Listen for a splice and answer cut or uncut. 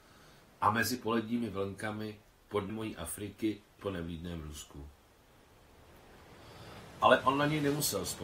cut